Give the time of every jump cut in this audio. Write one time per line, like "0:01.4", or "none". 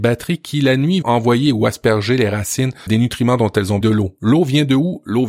0:01.0
0:02.9
0:03.8